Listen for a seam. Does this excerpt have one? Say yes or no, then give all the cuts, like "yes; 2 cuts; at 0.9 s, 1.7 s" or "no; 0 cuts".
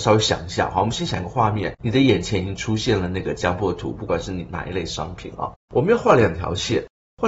yes; 1 cut; at 5.6 s